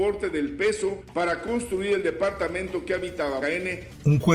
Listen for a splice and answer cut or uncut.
cut